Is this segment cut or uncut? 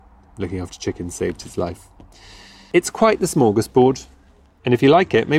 uncut